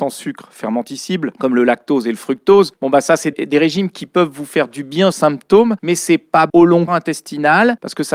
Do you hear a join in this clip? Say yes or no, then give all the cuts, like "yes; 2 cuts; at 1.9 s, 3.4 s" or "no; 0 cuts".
yes; 4 cuts; at 3.3 s, 5.1 s, 6.5 s, 6.9 s